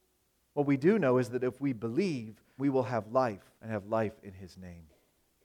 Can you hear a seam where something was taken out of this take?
yes; 2 cuts; at 2.6 s, 3.6 s

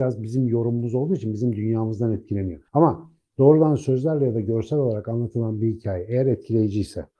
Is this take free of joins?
no; 1 cut; at 2.7 s

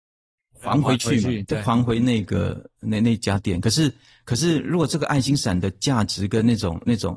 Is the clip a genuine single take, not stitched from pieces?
yes; 0 cuts

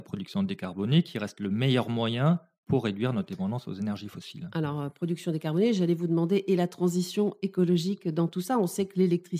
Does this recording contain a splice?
no; 0 cuts

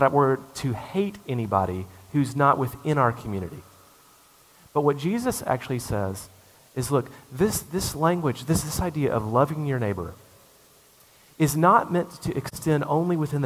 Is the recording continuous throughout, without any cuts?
yes; 0 cuts

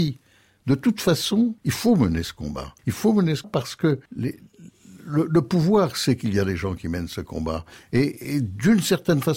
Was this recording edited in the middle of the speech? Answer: yes; 4 cuts; at 1.6 s, 2.8 s, 3.4 s, 4.1 s

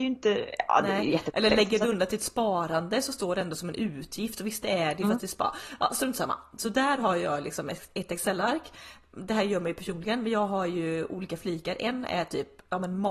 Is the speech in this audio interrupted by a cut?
no; 0 cuts

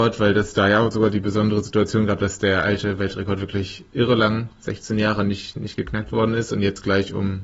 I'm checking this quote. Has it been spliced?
no; 0 cuts

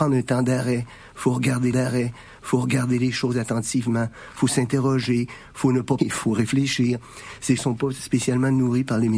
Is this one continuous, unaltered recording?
no; 3 cuts; at 1.7 s, 6.0 s, 7.6 s

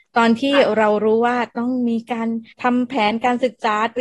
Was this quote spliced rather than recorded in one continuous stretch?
yes; 1 cut; at 2.5 s

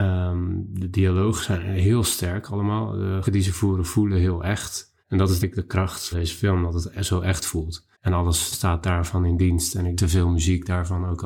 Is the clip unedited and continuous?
no; 7 cuts; at 3.2 s, 5.0 s, 5.4 s, 6.1 s, 7.9 s, 8.5 s, 9.9 s

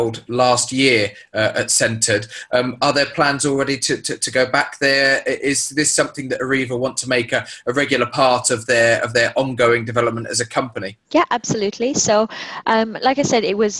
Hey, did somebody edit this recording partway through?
yes; 1 cut; at 11.0 s

